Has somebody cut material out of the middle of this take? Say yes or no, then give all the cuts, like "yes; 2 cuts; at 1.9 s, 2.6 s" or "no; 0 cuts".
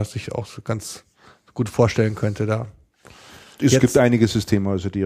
no; 0 cuts